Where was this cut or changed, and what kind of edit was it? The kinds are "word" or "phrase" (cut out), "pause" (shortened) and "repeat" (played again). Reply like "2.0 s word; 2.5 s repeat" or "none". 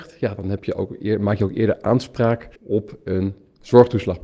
2.5 s pause